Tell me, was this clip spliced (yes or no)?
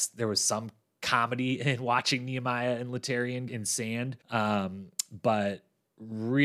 yes